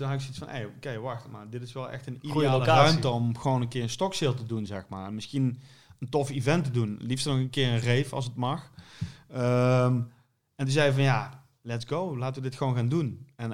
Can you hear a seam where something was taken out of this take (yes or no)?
no